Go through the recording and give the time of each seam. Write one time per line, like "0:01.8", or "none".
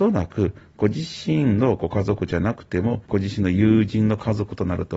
0:03.0

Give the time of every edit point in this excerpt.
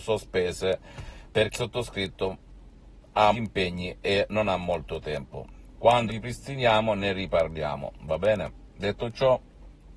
0:01.5
0:03.3
0:06.1

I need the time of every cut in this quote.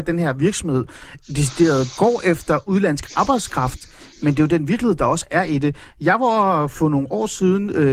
none

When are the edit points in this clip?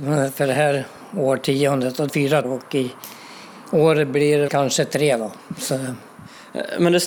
0:02.1
0:02.4
0:04.5

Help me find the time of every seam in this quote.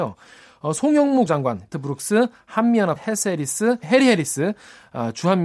0:01.3
0:01.7
0:03.0
0:03.8

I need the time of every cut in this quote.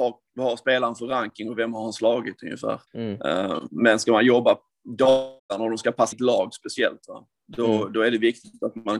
0:02.9
0:05.4
0:06.1

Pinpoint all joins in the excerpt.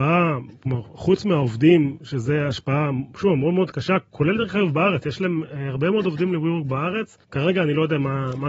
0:07.2

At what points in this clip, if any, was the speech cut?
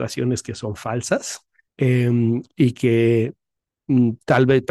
0:01.7

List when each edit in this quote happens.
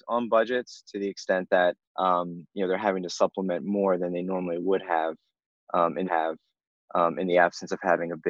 0:01.8
0:06.1

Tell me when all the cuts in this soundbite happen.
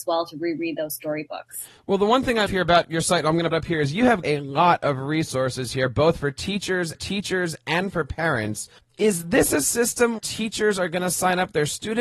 0:02.5
0:03.5
0:04.2
0:06.9
0:08.8
0:10.2

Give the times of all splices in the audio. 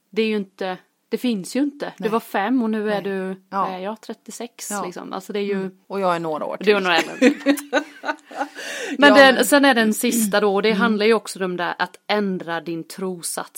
0:05.8

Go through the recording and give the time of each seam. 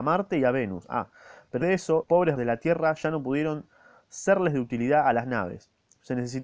0:01.6
0:02.0
0:02.4

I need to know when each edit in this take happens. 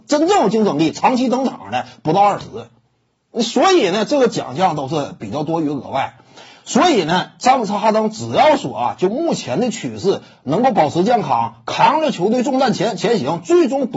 none

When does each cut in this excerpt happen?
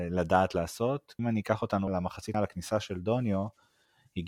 0:01.2
0:01.9
0:02.3

